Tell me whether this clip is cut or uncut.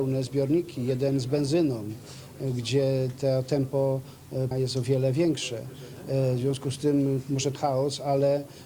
cut